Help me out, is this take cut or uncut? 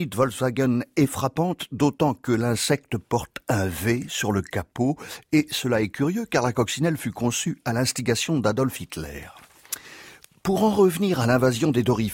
uncut